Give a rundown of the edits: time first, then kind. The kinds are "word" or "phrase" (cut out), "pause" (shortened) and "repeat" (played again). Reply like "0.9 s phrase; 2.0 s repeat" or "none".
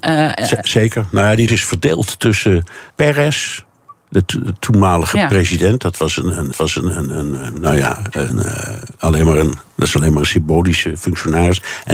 1.5 s word; 2.9 s pause; 6.5 s repeat; 8.3 s word; 9.7 s pause